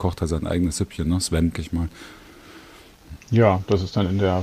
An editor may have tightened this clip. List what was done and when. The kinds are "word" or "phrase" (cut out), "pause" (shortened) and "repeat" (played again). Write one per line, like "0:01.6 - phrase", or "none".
0:01.5 - word